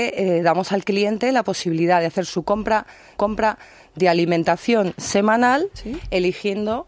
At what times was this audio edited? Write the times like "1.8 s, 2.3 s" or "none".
3.2 s